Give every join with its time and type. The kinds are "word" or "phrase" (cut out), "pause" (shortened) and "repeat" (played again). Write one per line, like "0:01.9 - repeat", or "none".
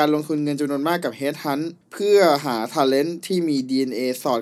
0:01.8 - pause